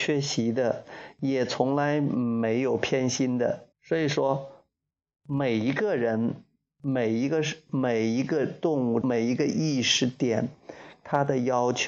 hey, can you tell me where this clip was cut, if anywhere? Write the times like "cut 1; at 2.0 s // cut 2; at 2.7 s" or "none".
cut 1; at 3.7 s // cut 2; at 9.0 s